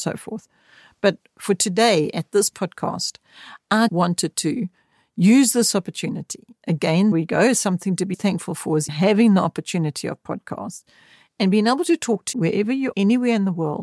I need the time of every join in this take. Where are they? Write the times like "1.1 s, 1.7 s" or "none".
3.9 s, 7.1 s, 8.1 s, 8.9 s, 12.3 s, 12.9 s